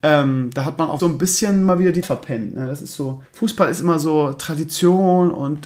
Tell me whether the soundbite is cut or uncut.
cut